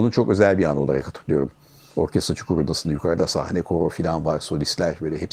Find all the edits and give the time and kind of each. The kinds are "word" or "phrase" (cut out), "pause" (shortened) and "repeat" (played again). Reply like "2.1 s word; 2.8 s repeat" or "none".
none